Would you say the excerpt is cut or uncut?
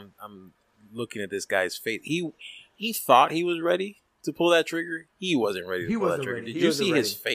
uncut